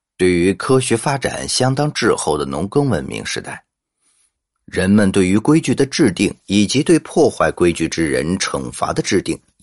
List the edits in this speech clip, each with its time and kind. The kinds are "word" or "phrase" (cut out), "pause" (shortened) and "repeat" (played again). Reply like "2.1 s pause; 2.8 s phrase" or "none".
none